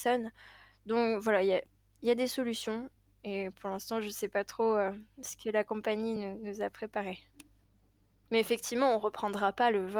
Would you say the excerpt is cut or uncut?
uncut